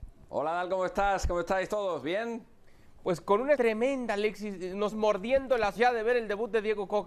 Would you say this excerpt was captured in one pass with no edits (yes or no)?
no